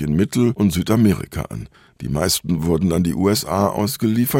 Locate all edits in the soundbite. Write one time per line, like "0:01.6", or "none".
none